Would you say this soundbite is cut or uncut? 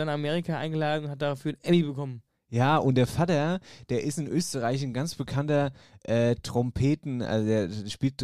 uncut